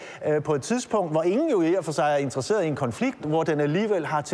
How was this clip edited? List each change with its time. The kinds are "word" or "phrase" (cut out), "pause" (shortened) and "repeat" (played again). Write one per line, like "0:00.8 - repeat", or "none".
0:03.2 - phrase